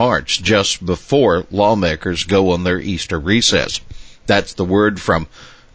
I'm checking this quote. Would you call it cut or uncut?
uncut